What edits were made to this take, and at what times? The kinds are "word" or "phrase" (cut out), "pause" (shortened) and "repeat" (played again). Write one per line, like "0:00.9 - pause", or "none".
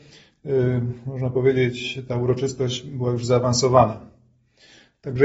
none